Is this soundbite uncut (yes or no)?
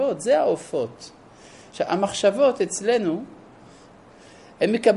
yes